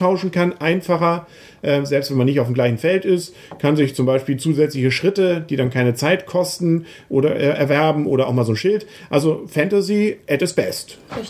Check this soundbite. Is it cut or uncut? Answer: uncut